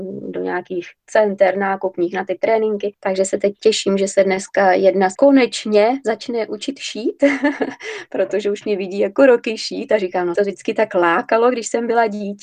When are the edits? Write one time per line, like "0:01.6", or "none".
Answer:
0:05.2
0:10.4